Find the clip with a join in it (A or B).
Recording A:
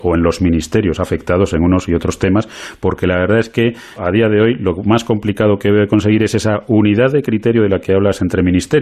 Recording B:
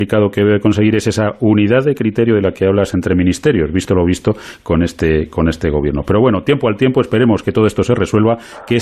A